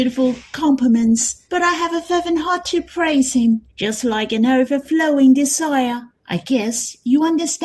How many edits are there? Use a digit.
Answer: 3